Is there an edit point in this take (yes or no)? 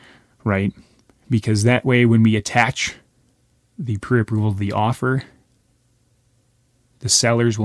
no